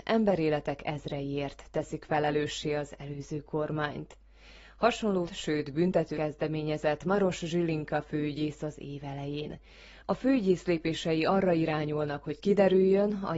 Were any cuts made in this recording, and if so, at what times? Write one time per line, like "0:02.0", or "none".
0:05.3
0:06.1

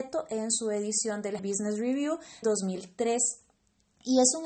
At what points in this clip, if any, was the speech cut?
0:01.4
0:02.4

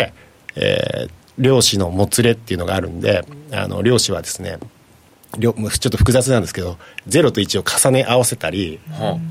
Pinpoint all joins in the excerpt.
none

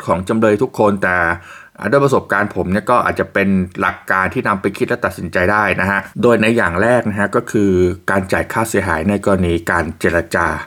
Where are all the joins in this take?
0:06.1

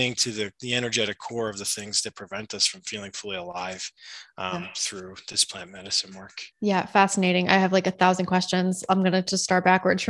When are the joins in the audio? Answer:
0:06.5

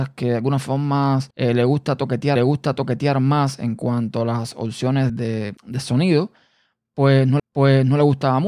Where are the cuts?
0:01.3
0:02.4
0:05.1
0:05.6
0:07.4

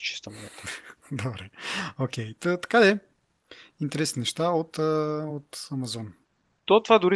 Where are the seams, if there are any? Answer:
none

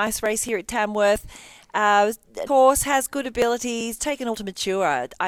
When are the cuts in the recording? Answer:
0:02.5
0:04.0
0:04.3

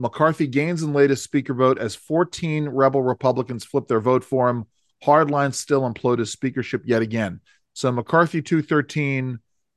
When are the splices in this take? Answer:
none

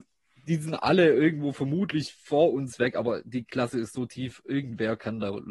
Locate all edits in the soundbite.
none

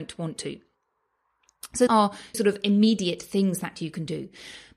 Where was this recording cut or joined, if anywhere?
0:01.9
0:02.3

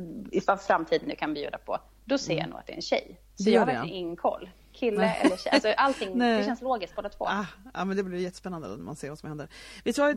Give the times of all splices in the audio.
0:03.3

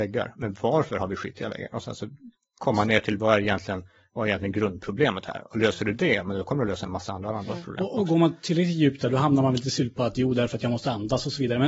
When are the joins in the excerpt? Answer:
none

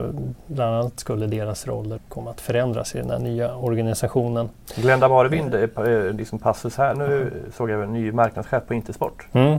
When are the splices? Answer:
0:02.0
0:06.9

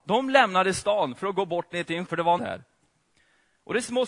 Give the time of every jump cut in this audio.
0:02.1
0:02.4

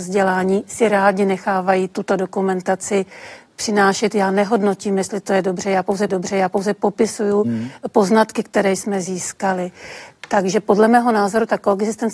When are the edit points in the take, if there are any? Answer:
0:06.1

